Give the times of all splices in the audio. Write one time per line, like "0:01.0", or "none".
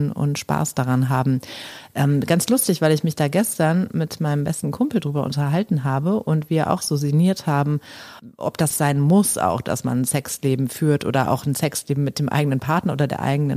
0:08.7